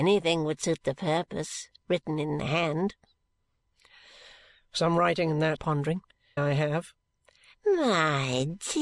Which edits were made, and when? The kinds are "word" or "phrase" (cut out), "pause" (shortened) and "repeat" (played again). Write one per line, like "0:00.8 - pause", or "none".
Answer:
0:05.6 - phrase
0:06.4 - word